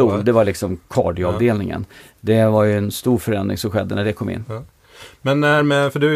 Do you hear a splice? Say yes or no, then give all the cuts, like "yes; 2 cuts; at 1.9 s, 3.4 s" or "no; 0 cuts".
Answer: no; 0 cuts